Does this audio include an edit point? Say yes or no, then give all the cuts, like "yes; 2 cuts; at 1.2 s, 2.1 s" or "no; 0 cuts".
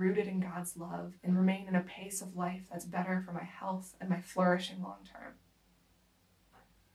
yes; 1 cut; at 1.2 s